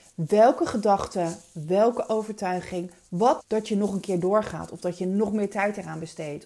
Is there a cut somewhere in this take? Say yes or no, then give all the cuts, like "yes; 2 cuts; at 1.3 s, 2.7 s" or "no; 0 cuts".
yes; 1 cut; at 3.4 s